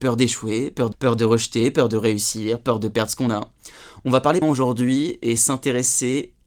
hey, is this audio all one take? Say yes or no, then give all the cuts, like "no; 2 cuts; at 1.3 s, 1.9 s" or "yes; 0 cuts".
no; 2 cuts; at 0.9 s, 4.4 s